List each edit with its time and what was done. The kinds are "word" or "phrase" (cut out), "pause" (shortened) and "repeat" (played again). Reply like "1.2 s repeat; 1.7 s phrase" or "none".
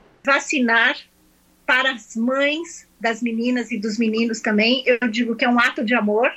none